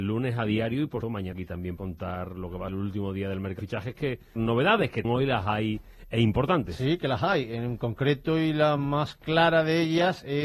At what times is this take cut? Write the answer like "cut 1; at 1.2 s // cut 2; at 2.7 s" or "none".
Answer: cut 1; at 1.0 s // cut 2; at 1.3 s // cut 3; at 1.8 s // cut 4; at 2.7 s // cut 5; at 3.6 s // cut 6; at 4.4 s // cut 7; at 5.0 s